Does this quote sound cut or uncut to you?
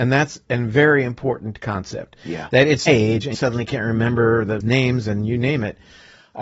cut